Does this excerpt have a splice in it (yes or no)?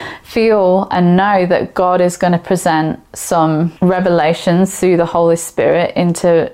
yes